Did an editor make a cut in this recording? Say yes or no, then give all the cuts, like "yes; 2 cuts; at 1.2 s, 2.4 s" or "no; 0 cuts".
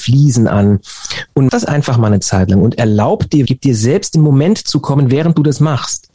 yes; 3 cuts; at 1.5 s, 3.5 s, 4.1 s